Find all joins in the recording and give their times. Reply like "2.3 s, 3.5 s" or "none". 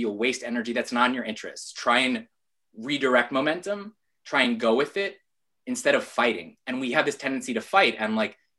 none